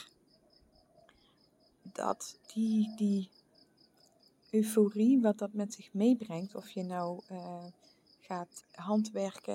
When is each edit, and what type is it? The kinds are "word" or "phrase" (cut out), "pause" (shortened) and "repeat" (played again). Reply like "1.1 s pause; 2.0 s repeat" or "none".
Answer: 2.4 s pause; 8.6 s word